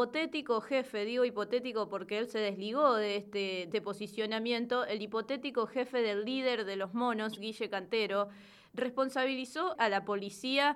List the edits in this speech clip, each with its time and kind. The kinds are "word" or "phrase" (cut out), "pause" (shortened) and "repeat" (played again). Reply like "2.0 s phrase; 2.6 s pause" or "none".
3.7 s word; 9.8 s word